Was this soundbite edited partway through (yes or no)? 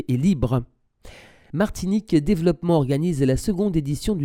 no